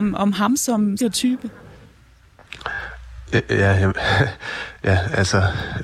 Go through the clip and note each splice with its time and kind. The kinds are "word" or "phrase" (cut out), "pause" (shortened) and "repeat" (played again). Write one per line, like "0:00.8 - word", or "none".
0:01.0 - phrase